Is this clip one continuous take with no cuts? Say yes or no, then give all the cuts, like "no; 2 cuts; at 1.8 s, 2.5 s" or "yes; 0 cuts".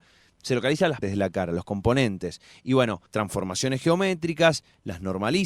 no; 2 cuts; at 1.0 s, 3.1 s